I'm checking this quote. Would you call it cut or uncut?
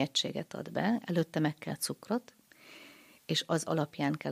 cut